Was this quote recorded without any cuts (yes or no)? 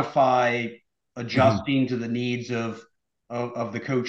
yes